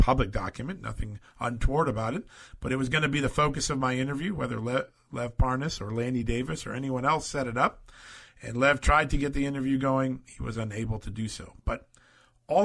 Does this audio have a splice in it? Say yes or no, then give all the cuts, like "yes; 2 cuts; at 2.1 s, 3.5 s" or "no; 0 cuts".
no; 0 cuts